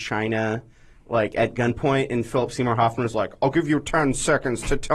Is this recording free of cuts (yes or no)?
yes